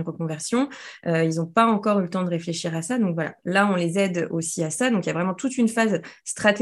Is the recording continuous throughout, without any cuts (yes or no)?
yes